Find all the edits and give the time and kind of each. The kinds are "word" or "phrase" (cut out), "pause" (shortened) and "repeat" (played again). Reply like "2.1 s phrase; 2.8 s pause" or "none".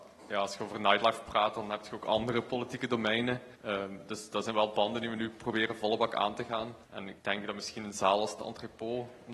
3.5 s pause; 6.8 s pause; 7.2 s pause